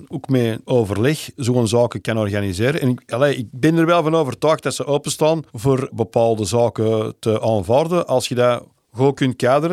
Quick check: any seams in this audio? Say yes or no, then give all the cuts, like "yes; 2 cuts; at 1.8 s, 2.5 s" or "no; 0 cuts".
no; 0 cuts